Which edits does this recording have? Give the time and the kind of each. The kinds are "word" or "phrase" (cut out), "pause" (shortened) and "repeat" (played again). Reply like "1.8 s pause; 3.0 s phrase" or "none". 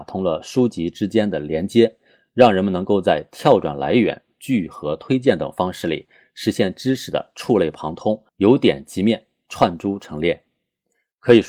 none